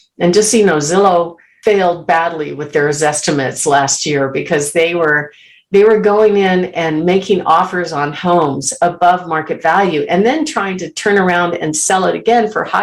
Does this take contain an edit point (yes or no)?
no